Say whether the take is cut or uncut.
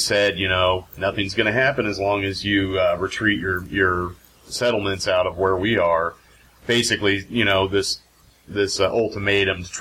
uncut